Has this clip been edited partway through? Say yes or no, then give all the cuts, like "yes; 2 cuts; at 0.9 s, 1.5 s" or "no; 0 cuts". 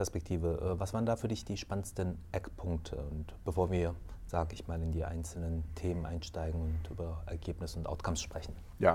no; 0 cuts